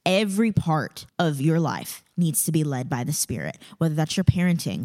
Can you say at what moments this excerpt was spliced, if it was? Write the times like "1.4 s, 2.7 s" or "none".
1.1 s